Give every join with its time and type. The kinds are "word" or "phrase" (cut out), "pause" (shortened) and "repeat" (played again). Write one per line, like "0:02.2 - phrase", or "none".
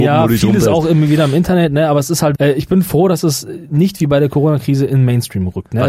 0:02.4 - word